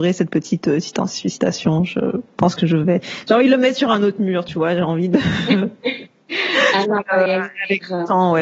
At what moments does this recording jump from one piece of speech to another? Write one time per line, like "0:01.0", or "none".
0:06.8